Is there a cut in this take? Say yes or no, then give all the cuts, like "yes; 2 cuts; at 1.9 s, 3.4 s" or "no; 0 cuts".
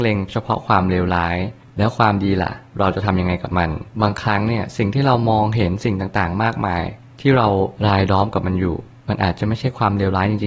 yes; 2 cuts; at 3.9 s, 7.8 s